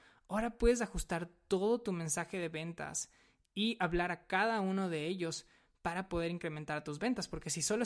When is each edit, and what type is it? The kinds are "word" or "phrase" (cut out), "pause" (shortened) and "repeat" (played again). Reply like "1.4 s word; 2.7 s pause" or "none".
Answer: none